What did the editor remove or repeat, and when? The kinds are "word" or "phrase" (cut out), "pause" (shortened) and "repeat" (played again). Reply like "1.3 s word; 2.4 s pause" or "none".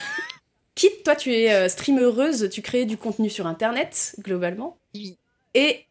none